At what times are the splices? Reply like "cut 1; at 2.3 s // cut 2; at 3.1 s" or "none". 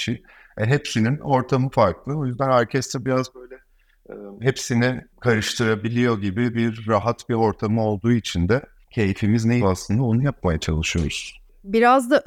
cut 1; at 9.6 s

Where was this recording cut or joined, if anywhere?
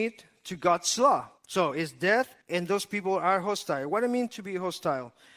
cut 1; at 1.4 s // cut 2; at 2.4 s

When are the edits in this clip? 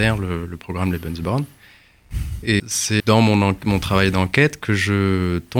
cut 1; at 2.6 s // cut 2; at 3.0 s

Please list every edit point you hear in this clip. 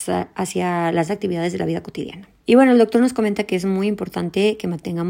cut 1; at 1.1 s // cut 2; at 2.4 s

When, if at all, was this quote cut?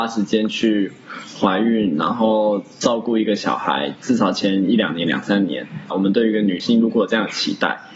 cut 1; at 5.9 s

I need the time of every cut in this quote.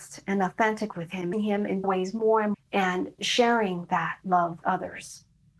cut 1; at 0.9 s // cut 2; at 1.3 s // cut 3; at 1.8 s // cut 4; at 2.5 s // cut 5; at 3.2 s // cut 6; at 4.6 s

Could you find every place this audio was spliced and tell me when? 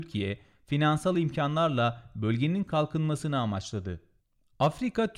none

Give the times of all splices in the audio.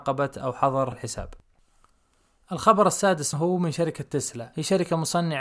cut 1; at 0.9 s // cut 2; at 3.3 s

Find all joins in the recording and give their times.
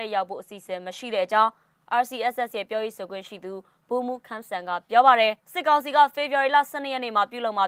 cut 1; at 5.4 s

